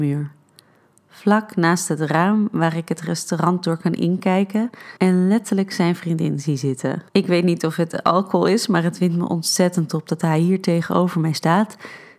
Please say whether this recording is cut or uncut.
cut